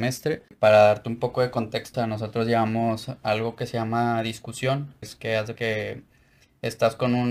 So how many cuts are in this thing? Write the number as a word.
three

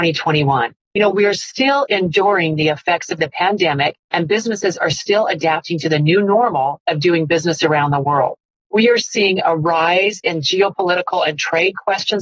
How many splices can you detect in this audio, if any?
zero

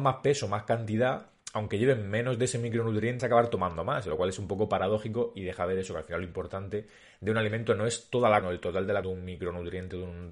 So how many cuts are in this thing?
three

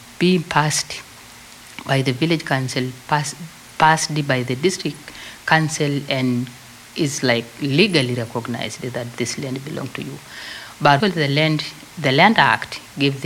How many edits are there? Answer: one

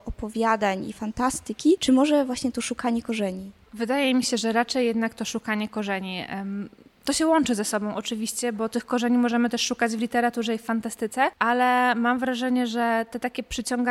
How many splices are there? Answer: zero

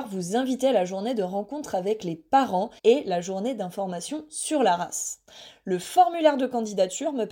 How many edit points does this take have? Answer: one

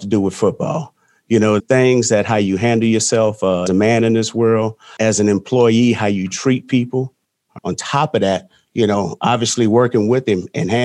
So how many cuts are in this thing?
four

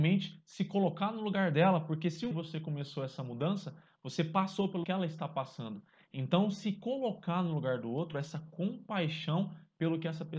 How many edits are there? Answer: two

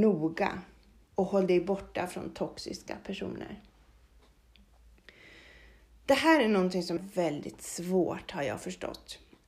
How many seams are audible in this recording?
one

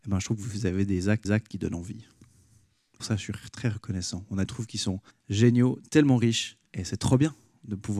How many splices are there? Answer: five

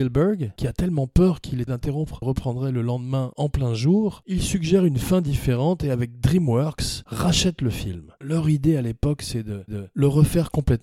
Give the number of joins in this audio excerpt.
three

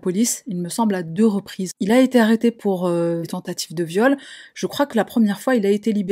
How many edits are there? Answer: one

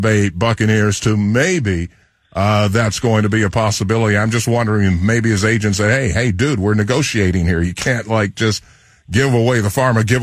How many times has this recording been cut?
zero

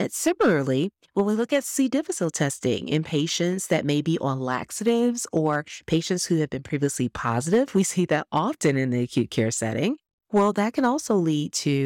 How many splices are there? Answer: zero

